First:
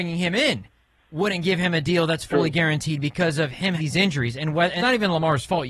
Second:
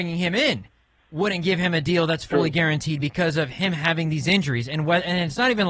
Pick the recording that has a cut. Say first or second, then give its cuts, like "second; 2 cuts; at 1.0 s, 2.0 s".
first; 2 cuts; at 3.8 s, 4.8 s